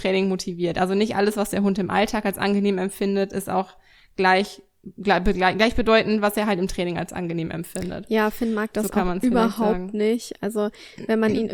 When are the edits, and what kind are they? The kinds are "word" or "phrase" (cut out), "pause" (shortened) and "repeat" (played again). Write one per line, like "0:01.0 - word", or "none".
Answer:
none